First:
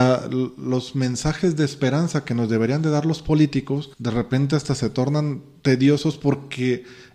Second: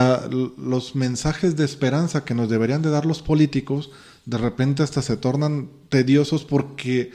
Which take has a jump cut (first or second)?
first